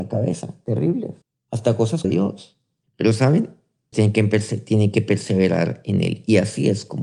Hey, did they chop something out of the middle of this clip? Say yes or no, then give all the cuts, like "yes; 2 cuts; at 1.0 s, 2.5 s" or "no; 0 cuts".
yes; 4 cuts; at 1.2 s, 2.0 s, 2.8 s, 3.9 s